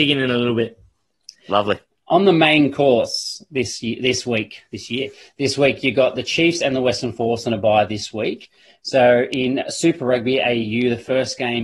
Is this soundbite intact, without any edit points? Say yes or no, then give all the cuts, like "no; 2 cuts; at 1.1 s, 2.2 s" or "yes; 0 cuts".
no; 1 cut; at 1.9 s